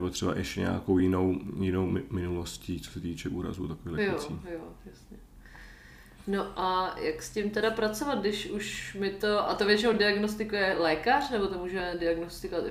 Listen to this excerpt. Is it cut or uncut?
uncut